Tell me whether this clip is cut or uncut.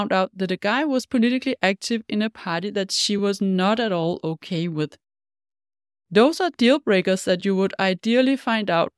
uncut